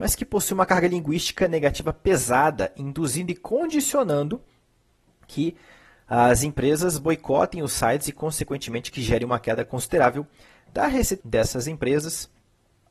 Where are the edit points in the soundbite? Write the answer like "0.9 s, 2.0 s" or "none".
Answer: 11.2 s